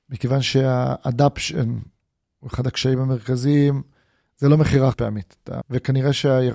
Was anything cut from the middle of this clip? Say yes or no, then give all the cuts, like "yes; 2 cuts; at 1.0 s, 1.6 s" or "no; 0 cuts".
yes; 2 cuts; at 4.9 s, 5.6 s